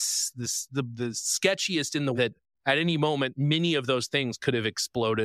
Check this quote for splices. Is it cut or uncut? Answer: cut